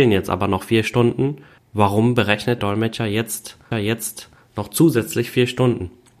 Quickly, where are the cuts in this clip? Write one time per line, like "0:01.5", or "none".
0:01.6
0:02.6
0:03.7